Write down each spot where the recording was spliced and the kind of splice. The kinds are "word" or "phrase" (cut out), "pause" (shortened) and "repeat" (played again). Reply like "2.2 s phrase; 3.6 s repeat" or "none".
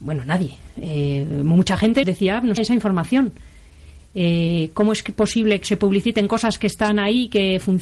2.0 s word; 2.6 s word; 5.6 s word